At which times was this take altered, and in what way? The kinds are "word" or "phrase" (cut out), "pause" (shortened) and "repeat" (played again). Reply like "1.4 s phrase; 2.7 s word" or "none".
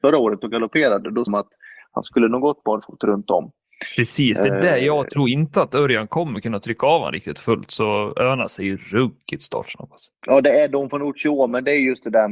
1.3 s phrase; 10.1 s pause